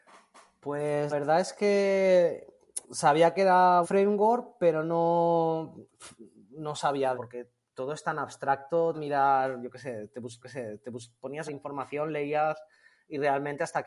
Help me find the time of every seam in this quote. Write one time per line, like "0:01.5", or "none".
0:01.1
0:02.8
0:03.8
0:07.1
0:08.9
0:10.4
0:11.5